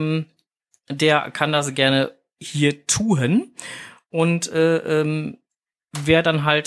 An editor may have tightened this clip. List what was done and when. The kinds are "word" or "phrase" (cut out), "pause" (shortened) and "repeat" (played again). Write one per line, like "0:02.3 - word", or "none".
none